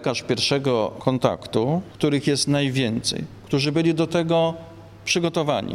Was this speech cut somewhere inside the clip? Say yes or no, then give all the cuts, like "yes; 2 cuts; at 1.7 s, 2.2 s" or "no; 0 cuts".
no; 0 cuts